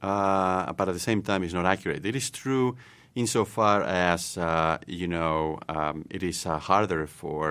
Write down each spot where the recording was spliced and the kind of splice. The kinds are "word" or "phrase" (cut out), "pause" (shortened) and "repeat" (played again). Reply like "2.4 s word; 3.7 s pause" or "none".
none